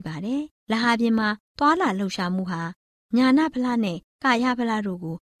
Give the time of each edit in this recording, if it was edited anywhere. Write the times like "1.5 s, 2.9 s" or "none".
none